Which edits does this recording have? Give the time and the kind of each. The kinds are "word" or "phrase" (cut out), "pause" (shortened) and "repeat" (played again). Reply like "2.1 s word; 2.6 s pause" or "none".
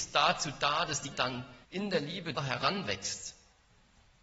1.1 s word; 1.6 s pause; 2.4 s word